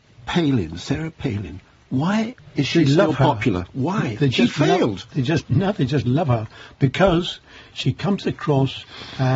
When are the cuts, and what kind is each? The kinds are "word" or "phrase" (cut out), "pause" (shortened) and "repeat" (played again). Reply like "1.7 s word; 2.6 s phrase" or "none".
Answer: none